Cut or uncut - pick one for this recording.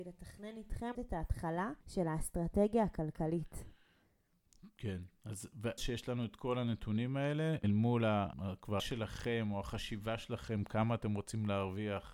cut